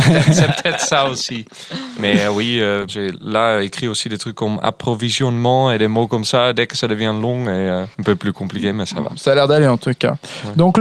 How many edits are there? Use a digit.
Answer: 2